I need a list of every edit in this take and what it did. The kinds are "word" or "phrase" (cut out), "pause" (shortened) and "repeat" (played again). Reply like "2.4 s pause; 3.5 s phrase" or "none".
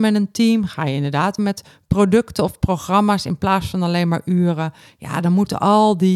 1.4 s word